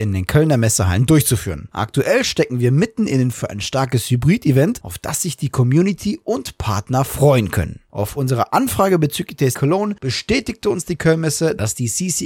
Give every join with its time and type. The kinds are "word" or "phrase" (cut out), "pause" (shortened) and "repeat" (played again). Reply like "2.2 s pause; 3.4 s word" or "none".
3.3 s word; 9.5 s word

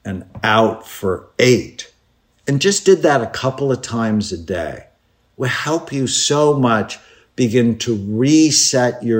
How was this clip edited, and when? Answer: none

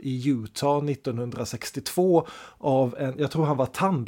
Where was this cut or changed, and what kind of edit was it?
none

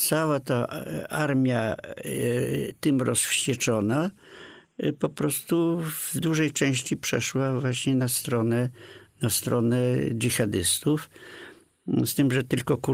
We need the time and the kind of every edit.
none

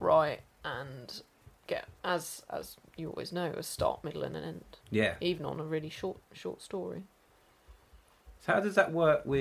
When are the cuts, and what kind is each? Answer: 4.8 s pause; 6.2 s pause; 8.4 s pause

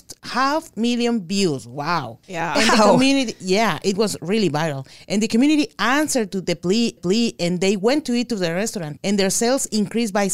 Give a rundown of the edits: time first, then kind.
7.0 s repeat

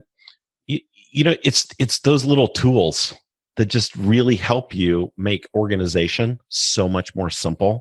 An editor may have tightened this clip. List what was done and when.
none

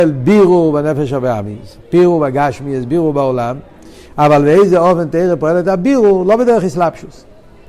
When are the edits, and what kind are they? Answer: none

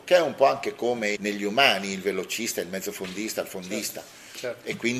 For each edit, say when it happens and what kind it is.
1.1 s word

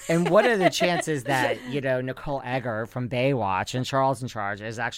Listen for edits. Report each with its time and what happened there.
none

